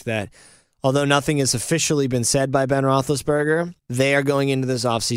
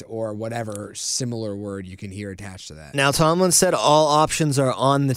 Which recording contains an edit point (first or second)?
first